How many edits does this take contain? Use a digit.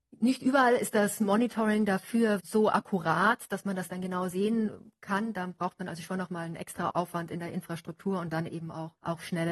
1